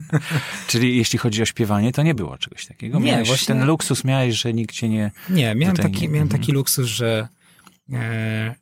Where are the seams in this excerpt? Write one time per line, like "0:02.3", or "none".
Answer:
none